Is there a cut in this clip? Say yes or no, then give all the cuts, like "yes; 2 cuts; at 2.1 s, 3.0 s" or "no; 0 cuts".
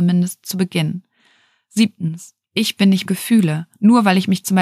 yes; 2 cuts; at 2.4 s, 3.1 s